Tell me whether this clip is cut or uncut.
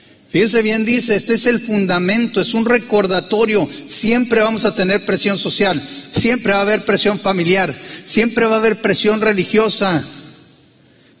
uncut